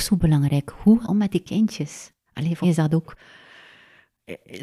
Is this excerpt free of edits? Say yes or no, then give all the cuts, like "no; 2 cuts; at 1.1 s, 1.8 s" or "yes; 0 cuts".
no; 3 cuts; at 1.0 s, 2.3 s, 2.6 s